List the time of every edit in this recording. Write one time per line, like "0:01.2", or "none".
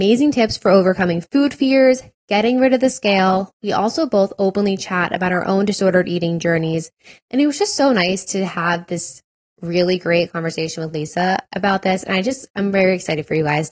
none